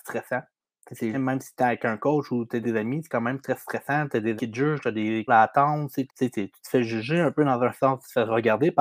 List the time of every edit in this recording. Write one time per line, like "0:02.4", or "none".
0:01.1
0:02.6
0:04.4
0:05.3
0:06.1
0:07.7